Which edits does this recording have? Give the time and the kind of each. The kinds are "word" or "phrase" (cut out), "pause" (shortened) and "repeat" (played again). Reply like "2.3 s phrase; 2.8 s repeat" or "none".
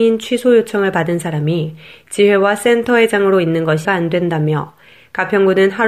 3.8 s word